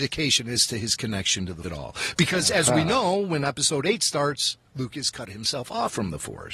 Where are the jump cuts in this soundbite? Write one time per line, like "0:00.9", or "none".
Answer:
0:01.6
0:04.6